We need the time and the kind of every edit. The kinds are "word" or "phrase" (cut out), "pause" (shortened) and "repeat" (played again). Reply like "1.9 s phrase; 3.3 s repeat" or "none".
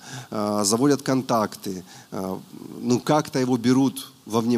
none